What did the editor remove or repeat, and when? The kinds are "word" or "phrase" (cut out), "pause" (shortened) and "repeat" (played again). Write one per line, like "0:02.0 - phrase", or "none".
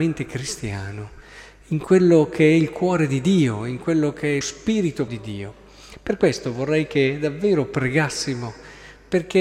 0:04.4 - word
0:05.1 - word